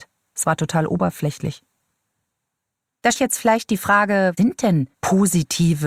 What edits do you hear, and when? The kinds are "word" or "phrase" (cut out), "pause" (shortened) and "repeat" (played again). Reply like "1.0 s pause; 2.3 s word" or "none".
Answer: 3.1 s phrase; 4.4 s word; 4.9 s pause

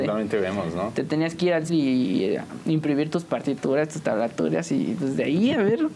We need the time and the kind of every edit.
1.7 s word

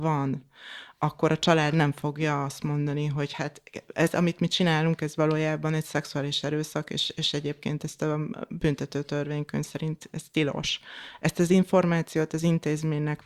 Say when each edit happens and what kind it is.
none

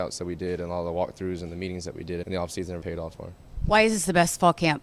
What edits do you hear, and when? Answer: 2.2 s word; 2.8 s word; 3.1 s word

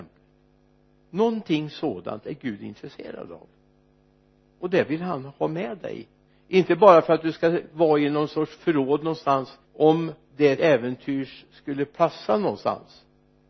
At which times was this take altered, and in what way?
6.3 s phrase; 9.6 s pause; 10.6 s word

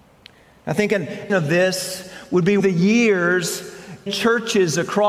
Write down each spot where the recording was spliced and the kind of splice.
1.3 s word; 2.6 s phrase; 4.1 s word

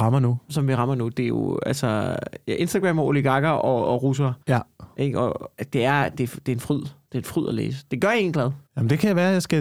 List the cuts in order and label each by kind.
4.4 s pause; 8.7 s pause

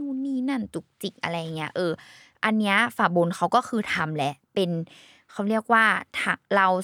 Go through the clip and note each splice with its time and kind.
none

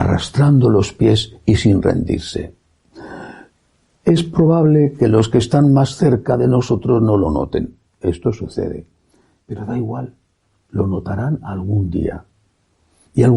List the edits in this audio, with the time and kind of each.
none

